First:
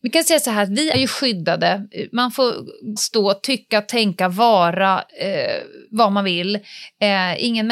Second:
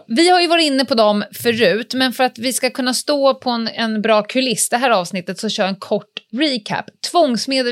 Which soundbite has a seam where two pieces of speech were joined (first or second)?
first